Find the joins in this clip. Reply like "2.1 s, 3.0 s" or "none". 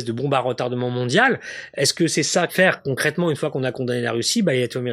2.5 s